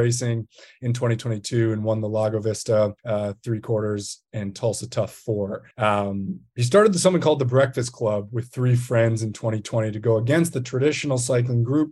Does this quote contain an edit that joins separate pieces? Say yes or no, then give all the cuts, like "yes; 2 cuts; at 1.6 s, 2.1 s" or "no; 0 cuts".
yes; 2 cuts; at 3.0 s, 5.7 s